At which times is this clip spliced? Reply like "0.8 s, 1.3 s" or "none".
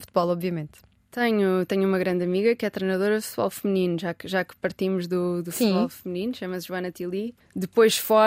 1.0 s

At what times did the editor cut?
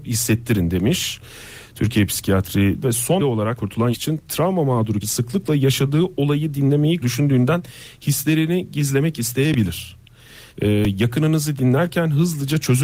2.8 s, 3.2 s, 3.6 s, 3.9 s, 5.0 s, 7.0 s, 10.5 s

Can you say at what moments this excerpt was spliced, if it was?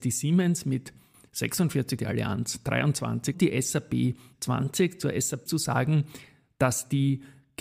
2.0 s, 3.3 s, 4.3 s, 5.5 s

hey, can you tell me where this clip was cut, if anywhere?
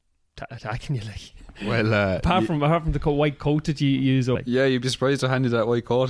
4.3 s

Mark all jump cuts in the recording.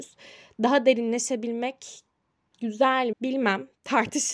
3.1 s

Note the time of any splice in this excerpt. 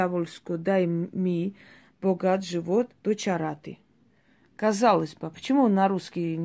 3.0 s

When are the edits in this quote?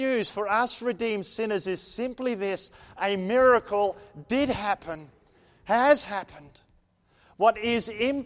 none

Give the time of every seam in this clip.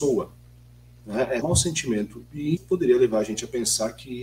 1.4 s, 2.6 s

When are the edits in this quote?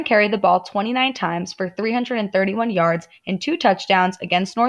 none

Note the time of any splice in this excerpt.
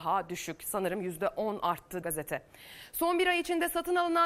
2.0 s

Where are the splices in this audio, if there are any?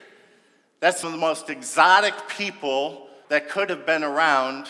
1.0 s, 3.2 s

